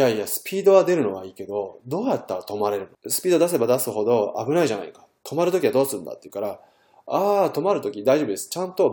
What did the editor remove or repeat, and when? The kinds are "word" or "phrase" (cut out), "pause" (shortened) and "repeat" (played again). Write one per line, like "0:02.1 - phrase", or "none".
0:02.9 - pause
0:05.2 - pause